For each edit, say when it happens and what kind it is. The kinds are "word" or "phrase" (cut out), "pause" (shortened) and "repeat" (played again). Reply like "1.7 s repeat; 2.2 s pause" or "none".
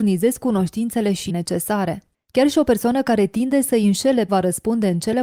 1.3 s word; 2.1 s pause; 4.3 s word